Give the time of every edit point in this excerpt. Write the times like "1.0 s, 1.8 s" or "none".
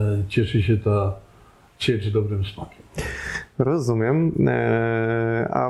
none

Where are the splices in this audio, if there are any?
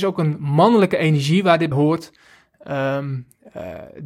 1.7 s

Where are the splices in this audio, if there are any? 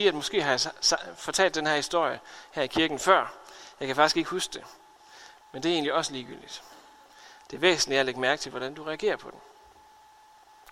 none

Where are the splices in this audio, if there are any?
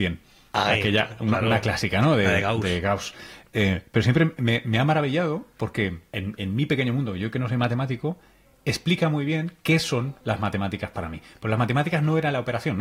6.1 s, 10.2 s

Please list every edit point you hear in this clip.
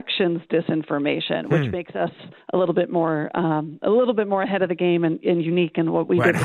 2.4 s

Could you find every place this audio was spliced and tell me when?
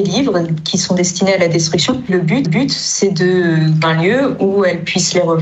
2.1 s, 2.4 s, 3.8 s

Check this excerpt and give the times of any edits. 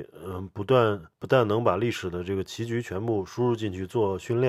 1.1 s

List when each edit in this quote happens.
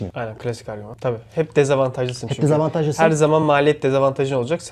none

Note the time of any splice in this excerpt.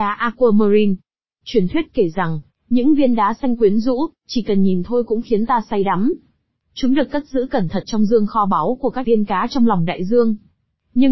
9.0 s

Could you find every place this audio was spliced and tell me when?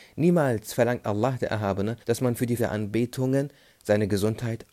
2.0 s, 2.6 s

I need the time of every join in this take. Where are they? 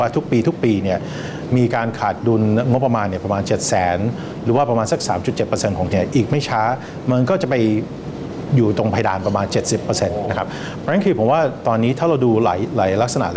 5.9 s

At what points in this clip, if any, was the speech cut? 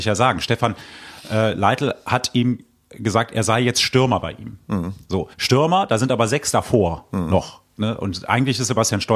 5.3 s

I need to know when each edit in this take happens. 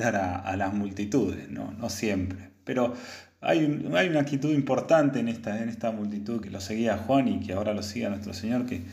6.4 s

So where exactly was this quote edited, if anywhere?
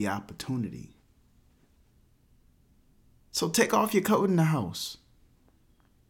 none

